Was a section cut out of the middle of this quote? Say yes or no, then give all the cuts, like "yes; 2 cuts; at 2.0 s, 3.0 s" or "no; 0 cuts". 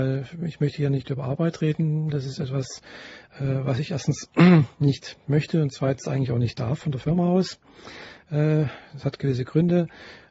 no; 0 cuts